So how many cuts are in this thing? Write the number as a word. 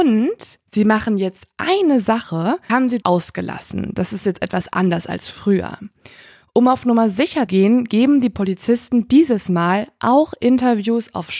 three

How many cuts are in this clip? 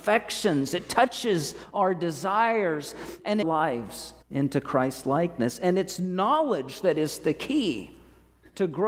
two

